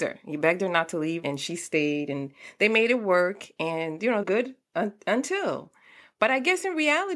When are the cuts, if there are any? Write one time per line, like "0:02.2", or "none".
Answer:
0:01.2
0:04.2